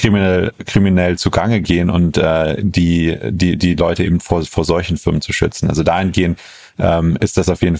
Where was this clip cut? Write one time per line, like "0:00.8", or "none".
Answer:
none